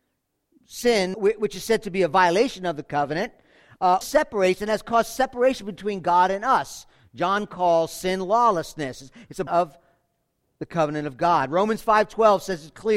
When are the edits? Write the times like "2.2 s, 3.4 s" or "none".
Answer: 1.1 s, 4.0 s, 9.5 s